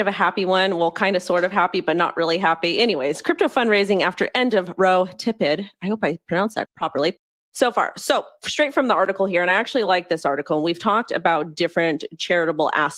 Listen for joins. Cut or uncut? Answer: uncut